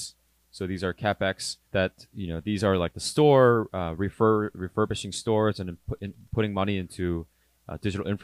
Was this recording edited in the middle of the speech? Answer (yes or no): yes